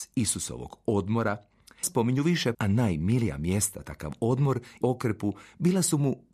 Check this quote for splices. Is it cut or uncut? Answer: cut